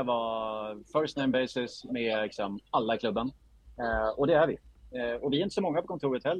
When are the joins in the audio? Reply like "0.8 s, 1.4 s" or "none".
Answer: none